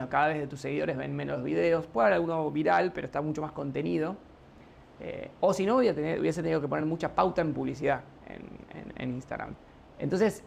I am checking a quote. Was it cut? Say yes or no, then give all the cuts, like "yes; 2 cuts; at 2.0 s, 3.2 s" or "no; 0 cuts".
no; 0 cuts